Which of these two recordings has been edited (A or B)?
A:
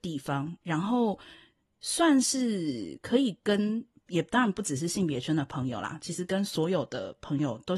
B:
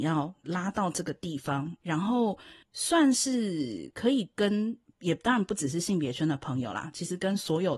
B